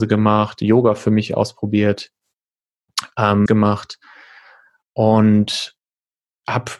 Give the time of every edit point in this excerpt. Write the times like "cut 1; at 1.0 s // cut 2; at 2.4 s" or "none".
cut 1; at 3.5 s